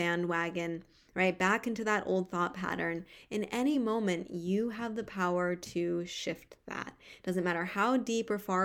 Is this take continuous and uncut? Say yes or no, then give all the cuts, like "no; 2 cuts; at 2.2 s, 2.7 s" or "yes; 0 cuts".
yes; 0 cuts